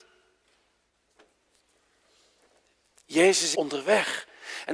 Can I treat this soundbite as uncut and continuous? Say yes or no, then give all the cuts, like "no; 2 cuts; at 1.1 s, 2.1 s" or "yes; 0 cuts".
no; 1 cut; at 3.5 s